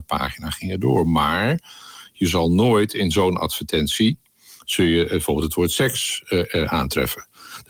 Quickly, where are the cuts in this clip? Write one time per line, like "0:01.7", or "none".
none